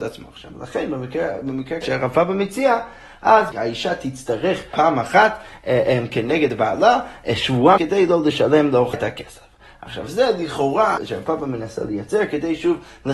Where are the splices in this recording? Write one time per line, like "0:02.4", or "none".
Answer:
0:01.8
0:03.5
0:04.7
0:07.8
0:08.9
0:11.0